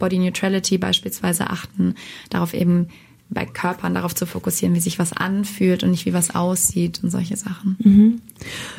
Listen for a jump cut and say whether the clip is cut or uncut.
uncut